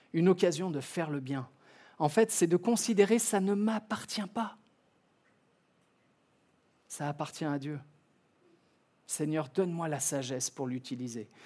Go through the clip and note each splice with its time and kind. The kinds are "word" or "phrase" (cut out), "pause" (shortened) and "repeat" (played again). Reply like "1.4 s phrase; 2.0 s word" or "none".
none